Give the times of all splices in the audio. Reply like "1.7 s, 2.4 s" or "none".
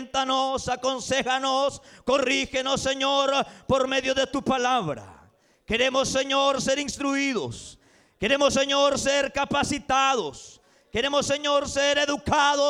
none